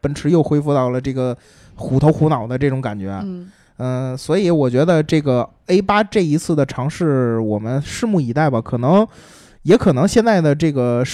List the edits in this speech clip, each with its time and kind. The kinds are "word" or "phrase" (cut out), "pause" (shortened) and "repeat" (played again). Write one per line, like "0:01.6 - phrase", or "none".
none